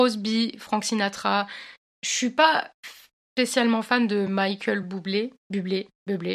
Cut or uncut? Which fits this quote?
uncut